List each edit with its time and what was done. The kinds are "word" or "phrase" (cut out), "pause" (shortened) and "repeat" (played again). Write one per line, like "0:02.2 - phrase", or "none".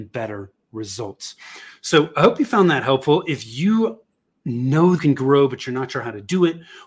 0:05.0 - phrase